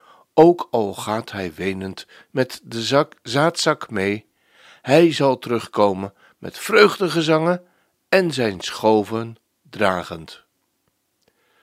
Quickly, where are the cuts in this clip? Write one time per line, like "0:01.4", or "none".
none